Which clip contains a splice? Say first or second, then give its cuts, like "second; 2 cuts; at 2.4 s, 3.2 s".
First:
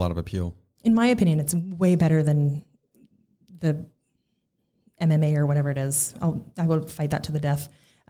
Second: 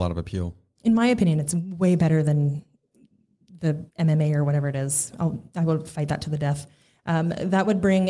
second; 1 cut; at 3.9 s